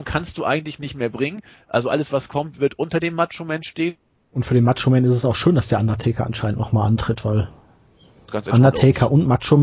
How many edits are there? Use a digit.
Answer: 0